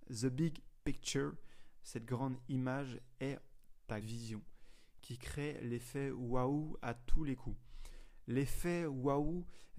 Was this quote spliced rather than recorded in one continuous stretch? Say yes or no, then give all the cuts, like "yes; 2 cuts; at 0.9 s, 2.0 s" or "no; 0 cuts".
yes; 1 cut; at 4.0 s